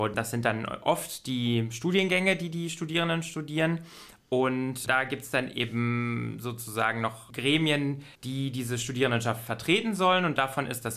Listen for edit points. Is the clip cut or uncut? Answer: cut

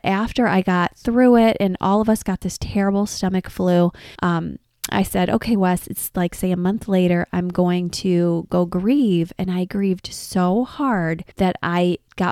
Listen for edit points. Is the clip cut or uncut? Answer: cut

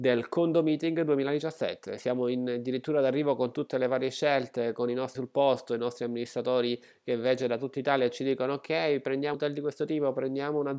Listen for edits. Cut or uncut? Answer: cut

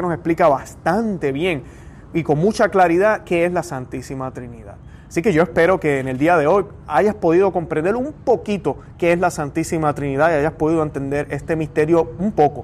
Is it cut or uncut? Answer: uncut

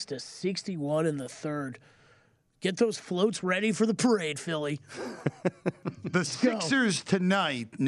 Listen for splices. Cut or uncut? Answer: uncut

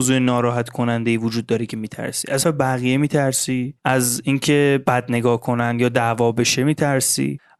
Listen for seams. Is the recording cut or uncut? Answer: cut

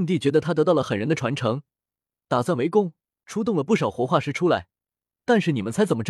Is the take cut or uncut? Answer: uncut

